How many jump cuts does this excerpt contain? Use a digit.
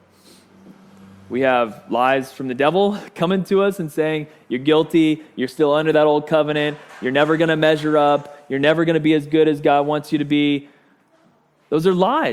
0